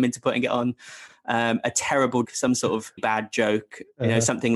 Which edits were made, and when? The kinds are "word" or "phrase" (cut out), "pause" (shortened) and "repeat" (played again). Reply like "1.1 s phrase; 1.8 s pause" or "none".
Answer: 2.2 s word; 3.0 s word